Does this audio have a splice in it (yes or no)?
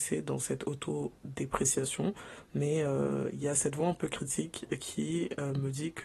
no